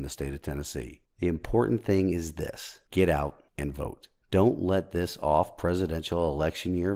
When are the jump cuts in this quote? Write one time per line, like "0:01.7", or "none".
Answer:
0:01.1
0:02.9
0:03.5
0:04.2